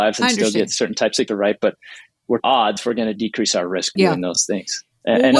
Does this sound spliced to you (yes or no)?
yes